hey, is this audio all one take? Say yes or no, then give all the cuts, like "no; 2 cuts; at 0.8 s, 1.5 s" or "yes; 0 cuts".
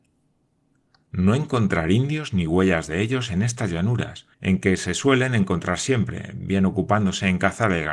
no; 1 cut; at 4.3 s